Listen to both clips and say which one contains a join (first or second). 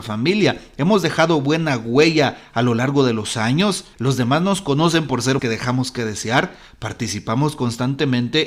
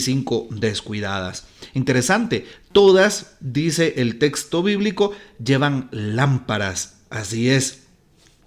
first